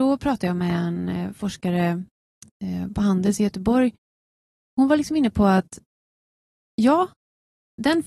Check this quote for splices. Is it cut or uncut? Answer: uncut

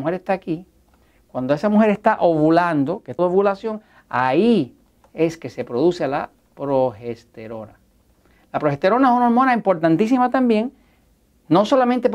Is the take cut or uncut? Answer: cut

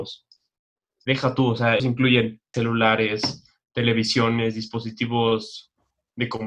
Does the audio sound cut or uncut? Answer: cut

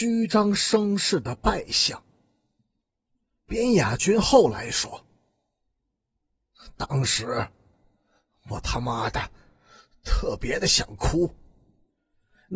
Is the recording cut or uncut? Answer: uncut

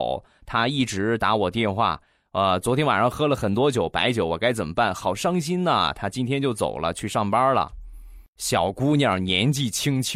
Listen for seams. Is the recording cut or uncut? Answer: uncut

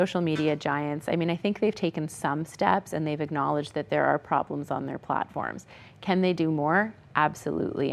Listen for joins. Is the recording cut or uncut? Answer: uncut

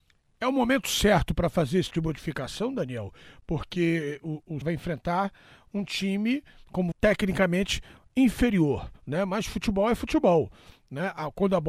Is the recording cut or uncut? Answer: cut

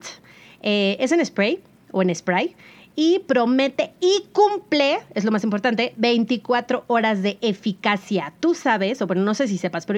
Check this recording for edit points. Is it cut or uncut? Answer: uncut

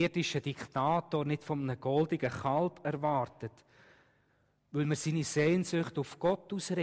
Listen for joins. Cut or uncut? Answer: uncut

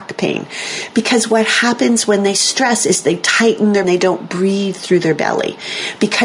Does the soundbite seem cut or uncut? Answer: cut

